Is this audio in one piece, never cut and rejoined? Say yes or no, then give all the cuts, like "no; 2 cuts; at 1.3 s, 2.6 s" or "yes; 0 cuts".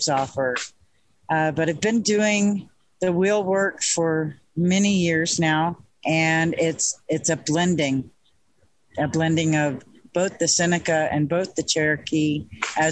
yes; 0 cuts